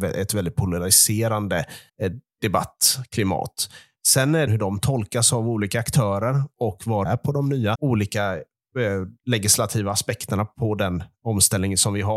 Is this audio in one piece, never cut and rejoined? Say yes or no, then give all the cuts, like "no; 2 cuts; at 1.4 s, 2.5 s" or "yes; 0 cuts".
no; 5 cuts; at 1.9 s, 4.5 s, 7.0 s, 7.7 s, 9.2 s